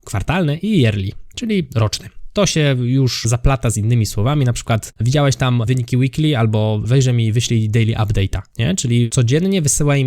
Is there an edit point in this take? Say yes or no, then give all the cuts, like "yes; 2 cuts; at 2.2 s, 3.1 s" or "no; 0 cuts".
no; 0 cuts